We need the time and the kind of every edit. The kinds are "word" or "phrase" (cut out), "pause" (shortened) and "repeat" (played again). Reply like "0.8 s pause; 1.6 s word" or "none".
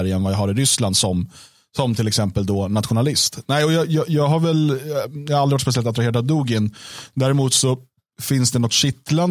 none